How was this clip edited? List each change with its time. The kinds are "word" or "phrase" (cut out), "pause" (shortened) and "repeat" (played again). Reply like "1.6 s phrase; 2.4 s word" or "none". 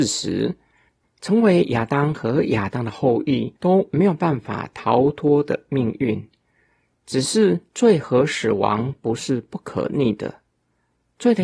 3.6 s pause

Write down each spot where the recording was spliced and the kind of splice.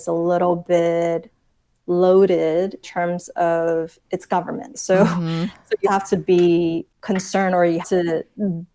2.8 s word; 4.0 s word; 4.7 s word; 5.8 s word; 7.8 s word

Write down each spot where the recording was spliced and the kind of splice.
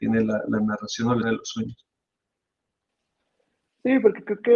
1.2 s word

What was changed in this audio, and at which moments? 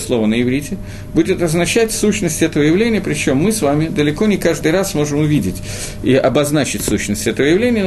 none

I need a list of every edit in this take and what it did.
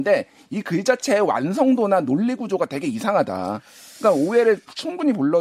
none

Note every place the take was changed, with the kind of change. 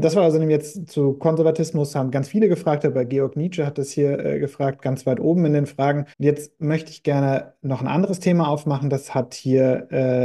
6.1 s pause

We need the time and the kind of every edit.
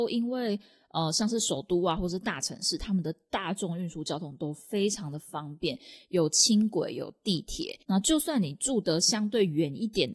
7.8 s pause

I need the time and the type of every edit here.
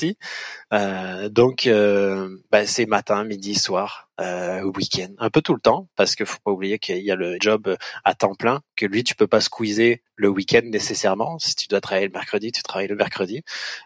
7.4 s phrase

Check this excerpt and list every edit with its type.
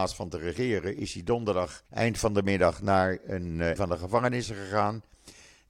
1.9 s pause; 3.8 s word

